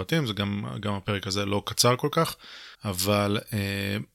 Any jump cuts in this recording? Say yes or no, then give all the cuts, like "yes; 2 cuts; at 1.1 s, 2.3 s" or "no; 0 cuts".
yes; 1 cut; at 2.7 s